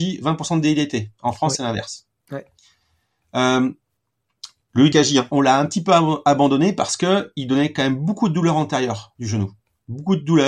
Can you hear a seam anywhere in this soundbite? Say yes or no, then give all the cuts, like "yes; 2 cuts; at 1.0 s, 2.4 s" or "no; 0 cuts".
no; 0 cuts